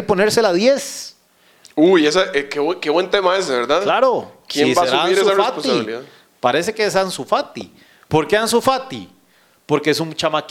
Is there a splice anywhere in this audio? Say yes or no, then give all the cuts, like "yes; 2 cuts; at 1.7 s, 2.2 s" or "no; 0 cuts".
no; 0 cuts